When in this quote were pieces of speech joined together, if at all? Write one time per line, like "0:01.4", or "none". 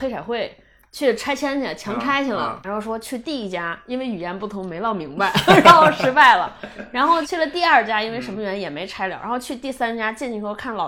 0:02.6